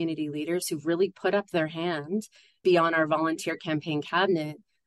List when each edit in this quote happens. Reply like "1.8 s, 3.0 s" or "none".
2.6 s